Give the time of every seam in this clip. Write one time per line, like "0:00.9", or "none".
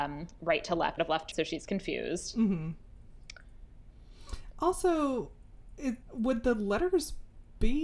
0:01.0
0:01.3
0:06.0